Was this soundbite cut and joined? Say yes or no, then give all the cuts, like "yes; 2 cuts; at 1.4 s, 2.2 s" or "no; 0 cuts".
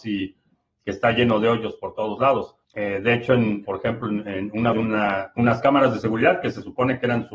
yes; 3 cuts; at 2.6 s, 3.6 s, 4.7 s